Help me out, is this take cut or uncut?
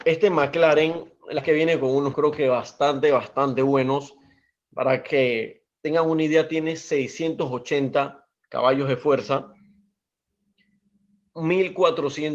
cut